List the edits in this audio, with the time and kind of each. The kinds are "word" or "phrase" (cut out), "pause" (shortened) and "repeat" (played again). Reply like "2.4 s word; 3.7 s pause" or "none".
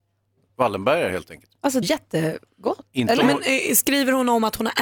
1.8 s phrase